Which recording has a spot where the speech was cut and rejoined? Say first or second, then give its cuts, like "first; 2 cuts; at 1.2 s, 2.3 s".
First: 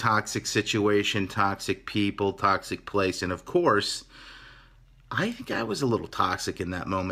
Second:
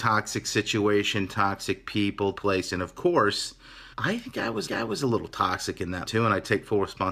second; 4 cuts; at 2.4 s, 3.9 s, 4.7 s, 6.0 s